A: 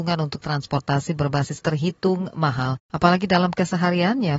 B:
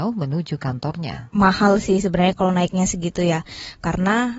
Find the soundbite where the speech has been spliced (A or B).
A